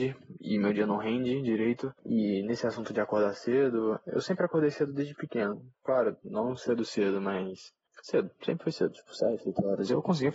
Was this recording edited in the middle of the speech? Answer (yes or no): yes